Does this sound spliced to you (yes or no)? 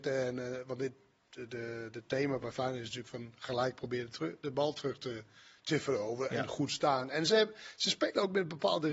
no